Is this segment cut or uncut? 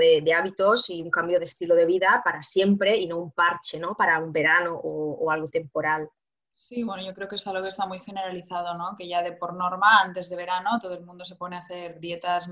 uncut